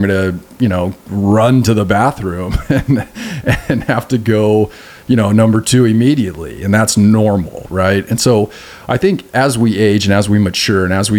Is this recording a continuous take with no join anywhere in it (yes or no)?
yes